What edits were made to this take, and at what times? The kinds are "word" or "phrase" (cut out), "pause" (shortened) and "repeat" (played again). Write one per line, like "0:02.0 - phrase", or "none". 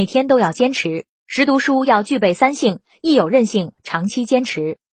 0:01.2 - pause